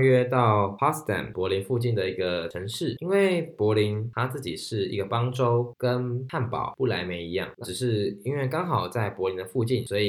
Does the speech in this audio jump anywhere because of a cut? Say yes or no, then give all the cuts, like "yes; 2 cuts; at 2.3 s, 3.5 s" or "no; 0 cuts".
yes; 1 cut; at 7.6 s